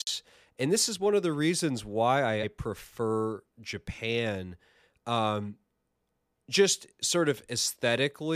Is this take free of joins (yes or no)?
no